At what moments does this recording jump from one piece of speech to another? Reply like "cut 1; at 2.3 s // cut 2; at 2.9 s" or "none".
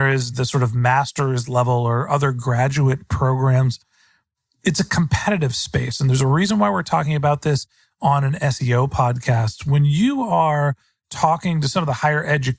none